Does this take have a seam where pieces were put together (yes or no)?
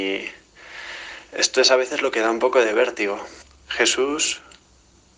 yes